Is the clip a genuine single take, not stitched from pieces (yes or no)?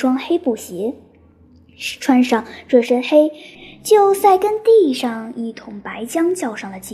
yes